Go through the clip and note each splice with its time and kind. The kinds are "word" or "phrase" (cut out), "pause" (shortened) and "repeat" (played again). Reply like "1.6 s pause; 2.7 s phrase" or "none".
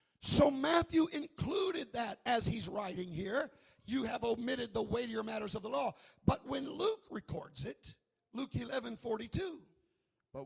none